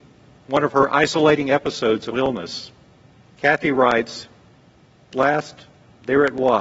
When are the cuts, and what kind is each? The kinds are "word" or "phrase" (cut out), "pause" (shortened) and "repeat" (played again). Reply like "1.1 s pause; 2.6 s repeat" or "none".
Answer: 2.1 s word; 3.1 s pause; 5.1 s word